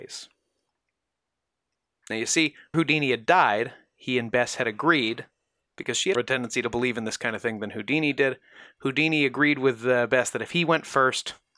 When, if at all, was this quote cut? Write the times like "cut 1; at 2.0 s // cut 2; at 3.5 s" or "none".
cut 1; at 2.7 s // cut 2; at 6.1 s